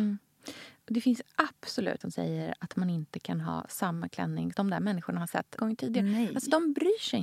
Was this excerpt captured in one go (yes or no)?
no